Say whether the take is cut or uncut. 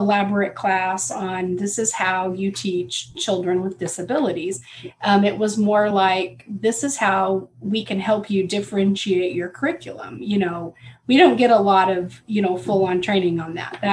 uncut